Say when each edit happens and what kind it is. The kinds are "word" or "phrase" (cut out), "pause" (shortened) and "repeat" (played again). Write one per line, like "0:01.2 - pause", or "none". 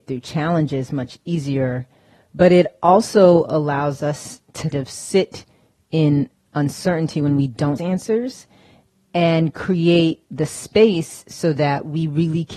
0:04.7 - word
0:07.8 - phrase